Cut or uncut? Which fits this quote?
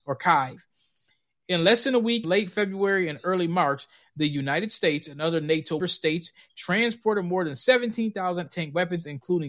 cut